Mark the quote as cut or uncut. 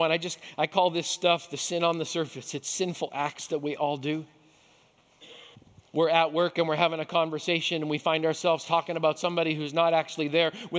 cut